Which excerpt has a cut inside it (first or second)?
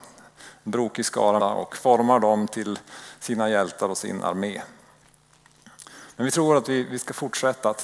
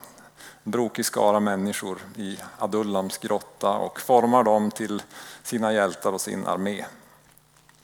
first